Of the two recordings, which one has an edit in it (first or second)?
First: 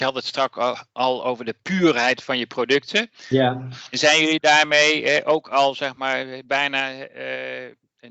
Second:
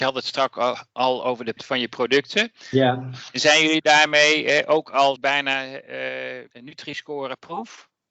second